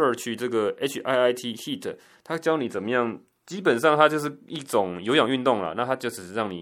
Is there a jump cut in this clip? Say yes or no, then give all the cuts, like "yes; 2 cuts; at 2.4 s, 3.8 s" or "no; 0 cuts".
no; 0 cuts